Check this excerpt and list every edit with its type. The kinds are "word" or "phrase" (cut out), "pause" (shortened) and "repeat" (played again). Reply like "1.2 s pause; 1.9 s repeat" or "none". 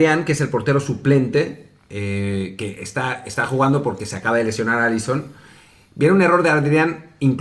none